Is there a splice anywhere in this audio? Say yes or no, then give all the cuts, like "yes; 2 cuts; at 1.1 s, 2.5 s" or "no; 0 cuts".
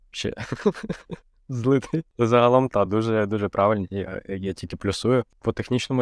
no; 0 cuts